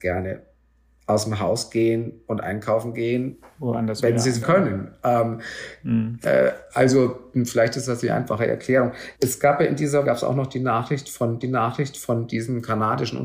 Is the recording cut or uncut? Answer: cut